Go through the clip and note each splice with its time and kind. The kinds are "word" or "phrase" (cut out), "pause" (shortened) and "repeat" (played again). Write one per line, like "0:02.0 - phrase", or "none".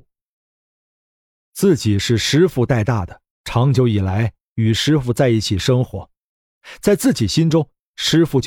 0:03.3 - pause